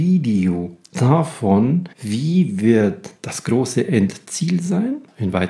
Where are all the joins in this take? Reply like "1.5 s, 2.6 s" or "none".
1.9 s